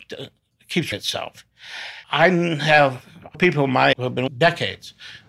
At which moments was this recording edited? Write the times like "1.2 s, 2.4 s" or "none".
0.9 s, 2.0 s, 3.3 s, 3.9 s, 4.3 s

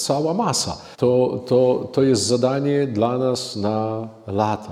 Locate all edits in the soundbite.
0.9 s

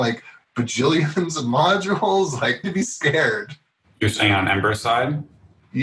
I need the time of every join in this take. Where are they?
2.6 s

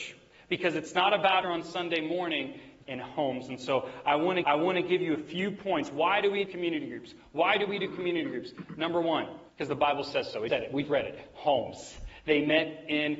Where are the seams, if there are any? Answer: 1.4 s, 2.8 s, 4.4 s, 6.5 s, 9.5 s, 10.5 s, 10.8 s

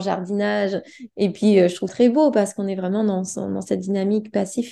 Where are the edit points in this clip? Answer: 1.9 s

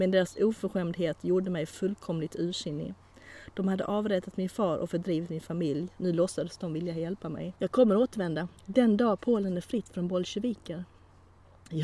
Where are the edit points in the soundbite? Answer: 7.6 s, 8.6 s

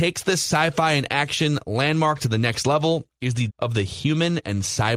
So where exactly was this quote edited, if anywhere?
3.5 s

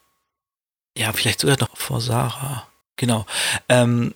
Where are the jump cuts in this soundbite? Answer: 1.7 s, 2.8 s

